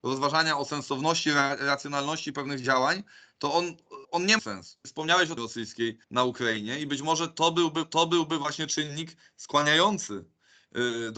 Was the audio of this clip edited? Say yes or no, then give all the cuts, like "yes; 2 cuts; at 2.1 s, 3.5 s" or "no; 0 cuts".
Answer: yes; 5 cuts; at 4.0 s, 4.4 s, 5.4 s, 6.0 s, 7.8 s